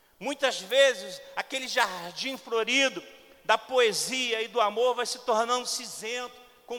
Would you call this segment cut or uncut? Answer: uncut